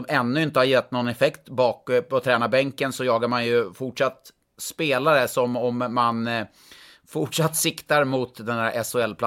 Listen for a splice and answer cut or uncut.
uncut